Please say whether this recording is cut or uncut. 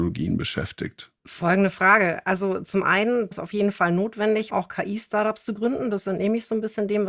cut